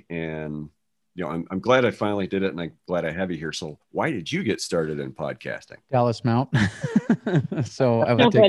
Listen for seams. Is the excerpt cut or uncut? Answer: cut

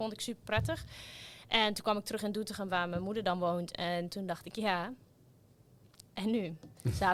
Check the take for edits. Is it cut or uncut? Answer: uncut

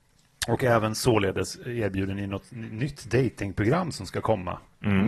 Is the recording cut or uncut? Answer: uncut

